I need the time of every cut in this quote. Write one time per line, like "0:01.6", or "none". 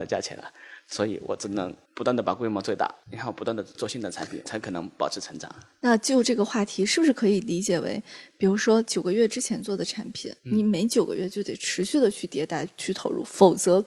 0:01.9
0:10.4